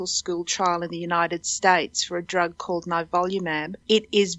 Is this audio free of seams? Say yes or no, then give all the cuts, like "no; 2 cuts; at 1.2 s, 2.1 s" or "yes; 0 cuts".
yes; 0 cuts